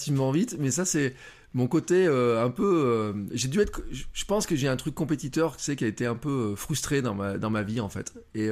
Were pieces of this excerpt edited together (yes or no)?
no